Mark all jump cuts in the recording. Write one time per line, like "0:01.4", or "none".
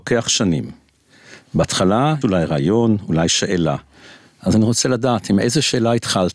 0:02.2